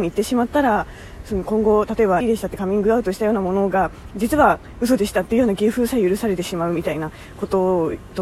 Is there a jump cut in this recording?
yes; 1 cut; at 2.2 s

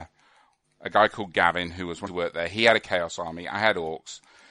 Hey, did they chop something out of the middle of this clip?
yes; 1 cut; at 2.1 s

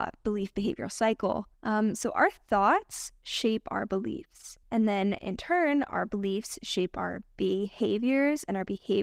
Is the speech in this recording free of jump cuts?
no; 2 cuts; at 1.5 s, 4.6 s

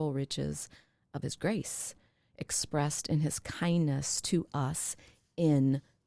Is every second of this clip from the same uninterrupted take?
yes; 0 cuts

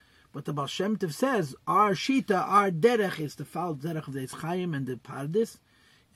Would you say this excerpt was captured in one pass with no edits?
yes; 0 cuts

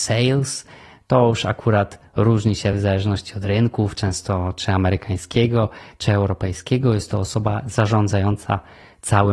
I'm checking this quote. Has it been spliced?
no; 0 cuts

